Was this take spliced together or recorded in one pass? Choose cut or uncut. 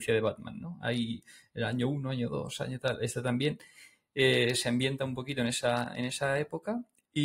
uncut